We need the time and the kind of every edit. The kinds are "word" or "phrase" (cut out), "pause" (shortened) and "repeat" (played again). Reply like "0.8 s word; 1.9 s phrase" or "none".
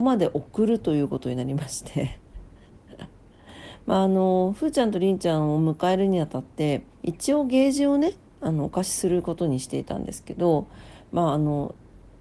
6.9 s pause